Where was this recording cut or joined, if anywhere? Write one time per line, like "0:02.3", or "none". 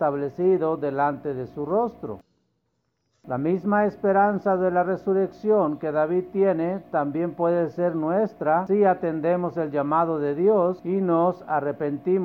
none